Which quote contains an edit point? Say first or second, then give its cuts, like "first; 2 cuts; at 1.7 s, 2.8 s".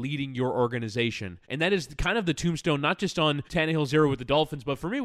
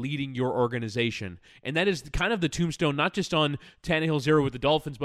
first; 2 cuts; at 1.4 s, 3.5 s